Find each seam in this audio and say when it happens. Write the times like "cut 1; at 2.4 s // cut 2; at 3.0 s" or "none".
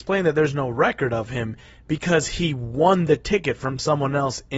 none

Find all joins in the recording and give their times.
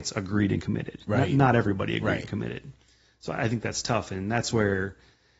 none

